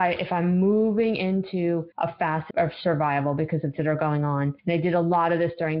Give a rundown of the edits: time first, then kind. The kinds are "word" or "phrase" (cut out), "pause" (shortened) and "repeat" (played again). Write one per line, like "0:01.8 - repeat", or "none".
0:01.9 - pause
0:02.5 - word
0:03.8 - word
0:04.6 - pause